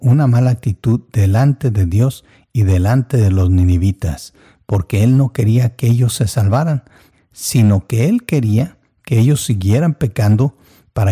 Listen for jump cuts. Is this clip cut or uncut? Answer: uncut